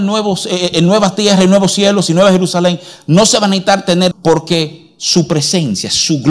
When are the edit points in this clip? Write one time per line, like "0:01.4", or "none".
0:04.1